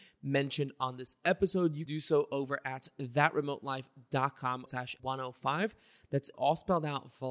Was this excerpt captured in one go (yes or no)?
no